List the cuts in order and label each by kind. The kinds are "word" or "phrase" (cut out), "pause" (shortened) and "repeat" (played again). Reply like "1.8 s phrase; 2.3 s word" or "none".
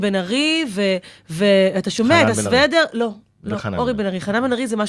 none